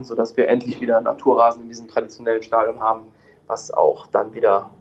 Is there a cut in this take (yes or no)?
no